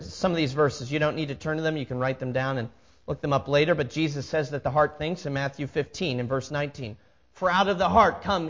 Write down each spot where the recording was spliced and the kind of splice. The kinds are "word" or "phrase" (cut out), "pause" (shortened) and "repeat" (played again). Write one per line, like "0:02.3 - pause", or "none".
none